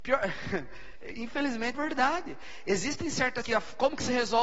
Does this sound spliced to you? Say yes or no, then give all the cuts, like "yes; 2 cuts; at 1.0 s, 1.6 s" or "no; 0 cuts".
yes; 2 cuts; at 1.7 s, 3.4 s